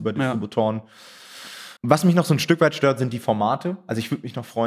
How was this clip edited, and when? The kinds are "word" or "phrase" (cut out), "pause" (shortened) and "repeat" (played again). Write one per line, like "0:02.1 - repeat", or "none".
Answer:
0:01.8 - pause